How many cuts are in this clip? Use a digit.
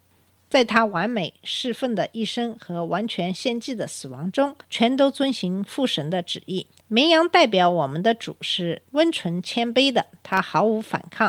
3